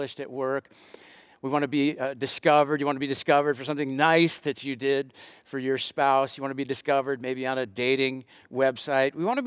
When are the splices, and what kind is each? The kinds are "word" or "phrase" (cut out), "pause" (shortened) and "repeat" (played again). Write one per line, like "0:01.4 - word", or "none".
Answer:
none